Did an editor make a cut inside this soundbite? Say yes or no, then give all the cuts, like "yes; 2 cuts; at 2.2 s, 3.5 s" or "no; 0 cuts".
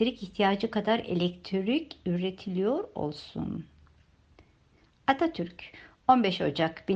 no; 0 cuts